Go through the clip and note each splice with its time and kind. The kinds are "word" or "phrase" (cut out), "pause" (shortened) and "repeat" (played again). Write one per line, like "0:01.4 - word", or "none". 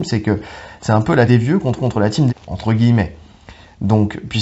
0:01.3 - word
0:01.8 - repeat
0:02.3 - phrase